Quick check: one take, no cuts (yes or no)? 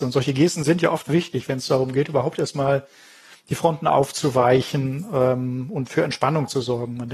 yes